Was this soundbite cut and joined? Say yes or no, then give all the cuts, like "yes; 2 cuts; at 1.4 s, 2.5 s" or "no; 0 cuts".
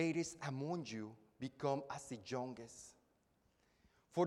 no; 0 cuts